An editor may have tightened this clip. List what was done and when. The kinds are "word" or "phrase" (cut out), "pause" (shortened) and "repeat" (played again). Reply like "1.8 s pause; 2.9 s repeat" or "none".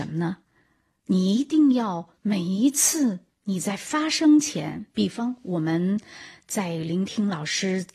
2.2 s pause